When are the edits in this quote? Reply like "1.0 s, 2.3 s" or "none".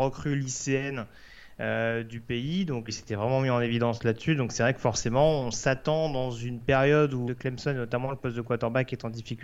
2.9 s, 7.3 s